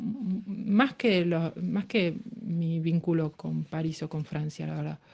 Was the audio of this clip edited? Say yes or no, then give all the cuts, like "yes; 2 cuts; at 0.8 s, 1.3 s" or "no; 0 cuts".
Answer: yes; 1 cut; at 3.3 s